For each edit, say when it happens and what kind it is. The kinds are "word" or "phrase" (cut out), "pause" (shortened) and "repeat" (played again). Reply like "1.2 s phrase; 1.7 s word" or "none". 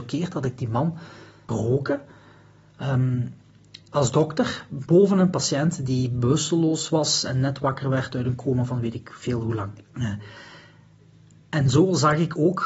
1.5 s word; 3.8 s pause; 9.9 s pause